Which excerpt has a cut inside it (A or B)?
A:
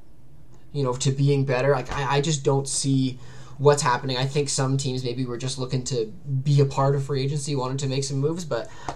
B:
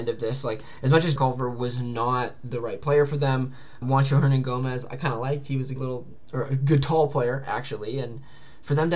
B